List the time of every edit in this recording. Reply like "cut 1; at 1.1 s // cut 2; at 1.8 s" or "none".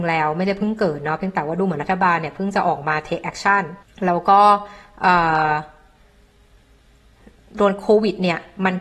cut 1; at 3.8 s